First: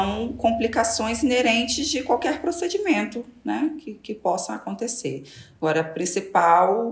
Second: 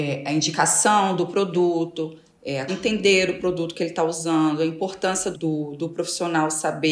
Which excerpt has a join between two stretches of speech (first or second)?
second